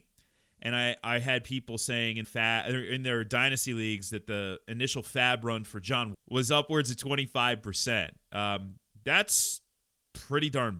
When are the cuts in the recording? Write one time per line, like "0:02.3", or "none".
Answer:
0:02.2
0:06.1